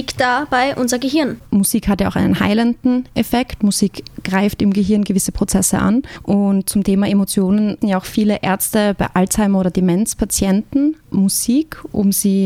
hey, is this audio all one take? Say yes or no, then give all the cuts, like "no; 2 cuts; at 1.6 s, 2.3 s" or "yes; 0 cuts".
no; 1 cut; at 7.8 s